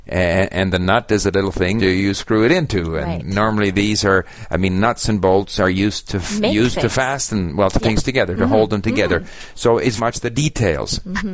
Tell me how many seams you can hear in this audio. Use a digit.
3